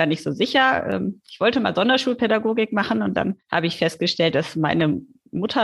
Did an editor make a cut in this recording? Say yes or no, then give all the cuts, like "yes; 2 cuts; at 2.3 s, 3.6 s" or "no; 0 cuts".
yes; 1 cut; at 3.4 s